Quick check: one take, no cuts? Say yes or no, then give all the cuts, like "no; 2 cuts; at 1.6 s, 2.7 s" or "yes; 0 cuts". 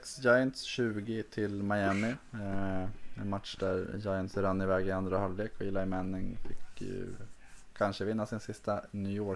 yes; 0 cuts